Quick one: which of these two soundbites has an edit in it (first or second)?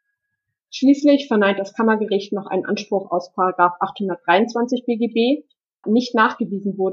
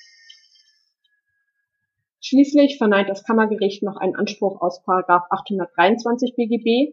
first